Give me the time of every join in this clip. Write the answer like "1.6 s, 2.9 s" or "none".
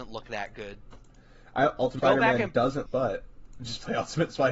2.0 s, 2.9 s